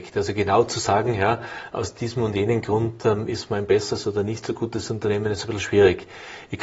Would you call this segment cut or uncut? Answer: uncut